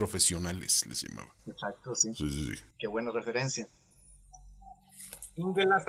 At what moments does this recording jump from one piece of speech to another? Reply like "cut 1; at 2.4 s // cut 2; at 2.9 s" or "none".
cut 1; at 2.7 s